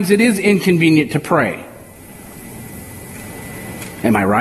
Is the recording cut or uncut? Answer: uncut